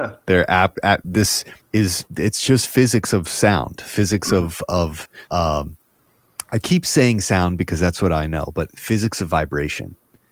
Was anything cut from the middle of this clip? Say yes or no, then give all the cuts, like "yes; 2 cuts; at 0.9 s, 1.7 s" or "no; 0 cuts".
yes; 2 cuts; at 1.6 s, 5.3 s